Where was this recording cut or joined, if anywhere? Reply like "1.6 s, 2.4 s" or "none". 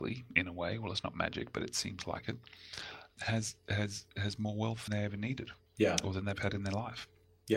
3.2 s, 4.9 s, 5.7 s